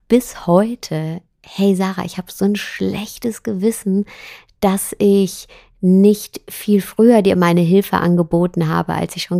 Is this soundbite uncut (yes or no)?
yes